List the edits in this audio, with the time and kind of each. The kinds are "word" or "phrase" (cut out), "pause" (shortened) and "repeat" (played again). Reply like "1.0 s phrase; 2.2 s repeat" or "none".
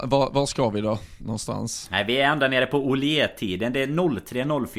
none